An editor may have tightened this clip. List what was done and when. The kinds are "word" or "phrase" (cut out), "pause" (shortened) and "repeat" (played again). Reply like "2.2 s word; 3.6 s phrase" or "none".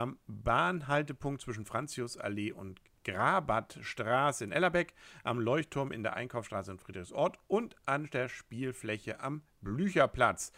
none